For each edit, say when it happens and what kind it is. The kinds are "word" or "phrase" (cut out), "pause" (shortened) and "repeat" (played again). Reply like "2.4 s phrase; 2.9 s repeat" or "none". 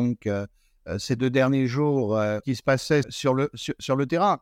2.4 s word; 3.0 s word